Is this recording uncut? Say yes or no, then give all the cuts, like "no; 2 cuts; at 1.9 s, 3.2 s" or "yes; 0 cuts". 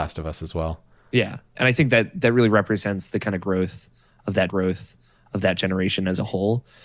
no; 1 cut; at 4.5 s